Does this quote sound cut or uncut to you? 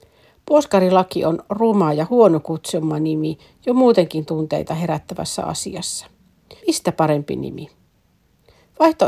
cut